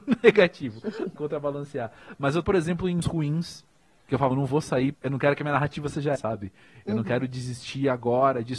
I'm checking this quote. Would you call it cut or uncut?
cut